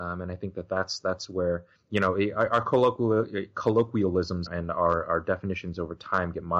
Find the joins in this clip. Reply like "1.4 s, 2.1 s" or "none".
1.8 s, 4.5 s